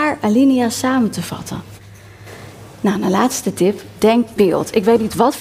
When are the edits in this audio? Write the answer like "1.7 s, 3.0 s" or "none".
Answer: 4.4 s